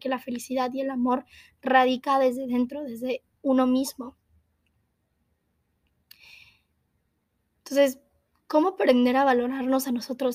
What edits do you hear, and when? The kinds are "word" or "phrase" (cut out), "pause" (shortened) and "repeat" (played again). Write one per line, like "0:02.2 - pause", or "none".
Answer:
none